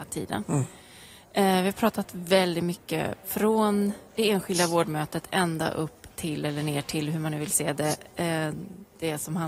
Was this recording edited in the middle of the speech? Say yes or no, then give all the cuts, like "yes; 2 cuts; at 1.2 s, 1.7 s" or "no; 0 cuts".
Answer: yes; 1 cut; at 4.1 s